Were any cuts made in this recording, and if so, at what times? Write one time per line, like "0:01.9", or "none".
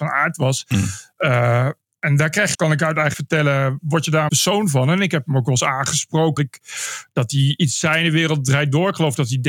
0:02.5
0:03.1
0:04.3
0:06.4